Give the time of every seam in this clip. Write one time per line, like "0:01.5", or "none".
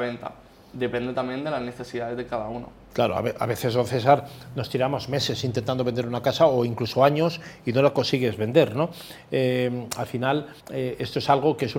0:10.6